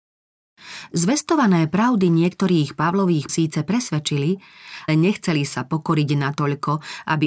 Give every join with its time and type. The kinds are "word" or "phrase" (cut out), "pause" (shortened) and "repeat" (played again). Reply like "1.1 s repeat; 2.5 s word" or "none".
3.3 s word; 4.9 s word